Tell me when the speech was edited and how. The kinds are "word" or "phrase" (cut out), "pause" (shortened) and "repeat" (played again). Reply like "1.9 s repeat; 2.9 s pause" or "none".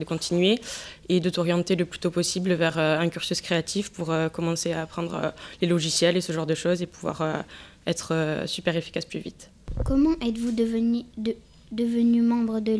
none